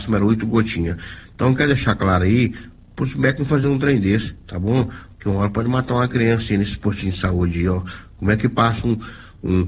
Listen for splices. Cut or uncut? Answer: uncut